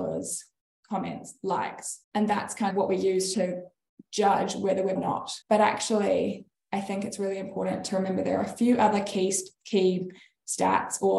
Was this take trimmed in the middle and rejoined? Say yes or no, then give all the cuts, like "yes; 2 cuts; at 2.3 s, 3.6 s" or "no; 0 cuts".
yes; 5 cuts; at 2.0 s, 2.7 s, 3.3 s, 5.0 s, 5.4 s